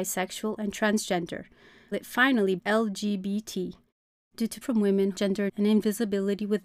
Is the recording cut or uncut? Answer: cut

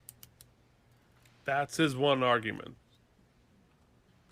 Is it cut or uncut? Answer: uncut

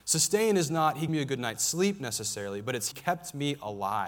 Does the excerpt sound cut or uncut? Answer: cut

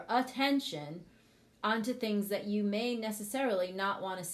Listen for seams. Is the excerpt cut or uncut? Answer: uncut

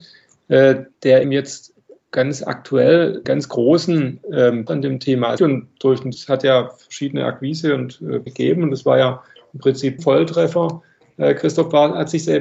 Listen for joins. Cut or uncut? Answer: cut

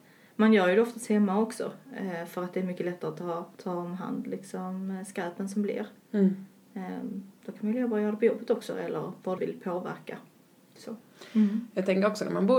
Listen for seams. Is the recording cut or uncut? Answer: cut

